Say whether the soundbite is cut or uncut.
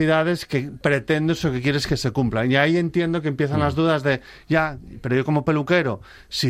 uncut